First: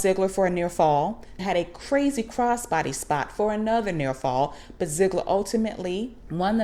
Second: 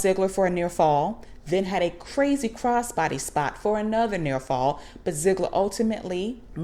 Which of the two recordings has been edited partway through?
first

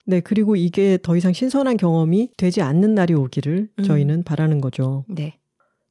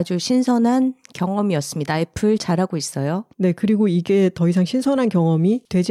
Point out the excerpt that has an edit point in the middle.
second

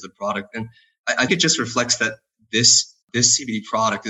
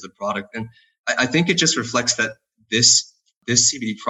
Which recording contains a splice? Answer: first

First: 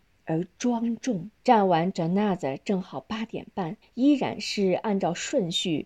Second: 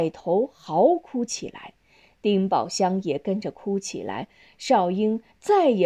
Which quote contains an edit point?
first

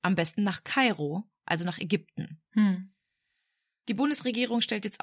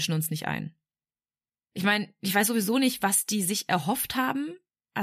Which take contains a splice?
first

